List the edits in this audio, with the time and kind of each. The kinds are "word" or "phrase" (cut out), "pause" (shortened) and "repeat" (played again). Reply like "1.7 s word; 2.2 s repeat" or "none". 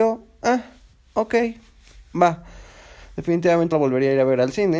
3.7 s word